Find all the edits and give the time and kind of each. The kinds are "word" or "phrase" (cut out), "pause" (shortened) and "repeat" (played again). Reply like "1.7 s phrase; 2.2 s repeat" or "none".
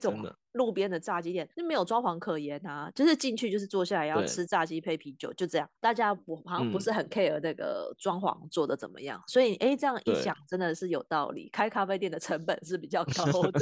1.5 s pause; 5.7 s pause